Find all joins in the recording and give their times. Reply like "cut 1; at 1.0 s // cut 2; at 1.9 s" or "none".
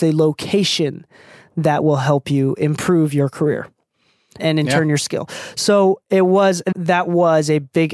cut 1; at 4.4 s // cut 2; at 6.7 s